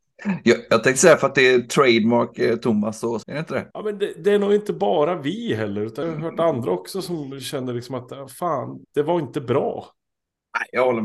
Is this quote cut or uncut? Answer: cut